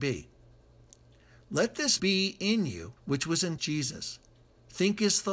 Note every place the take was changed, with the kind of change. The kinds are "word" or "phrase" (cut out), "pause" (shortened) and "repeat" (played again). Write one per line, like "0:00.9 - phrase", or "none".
0:02.0 - word
0:03.0 - pause
0:03.6 - word

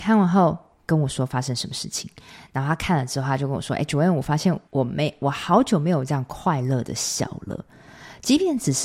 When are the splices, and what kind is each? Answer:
0:04.7 - pause

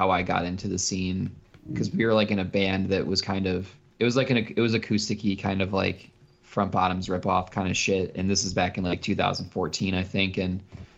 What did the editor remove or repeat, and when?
none

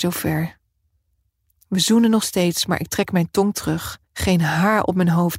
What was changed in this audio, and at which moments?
0:04.1 - pause

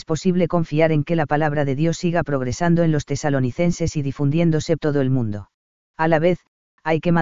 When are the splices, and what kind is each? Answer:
0:04.8 - word
0:05.8 - pause

